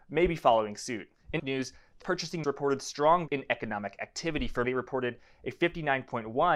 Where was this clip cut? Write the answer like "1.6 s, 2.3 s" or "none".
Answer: 1.4 s, 2.0 s, 2.4 s, 3.3 s, 4.6 s